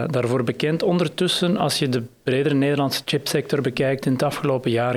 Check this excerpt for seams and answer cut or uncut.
cut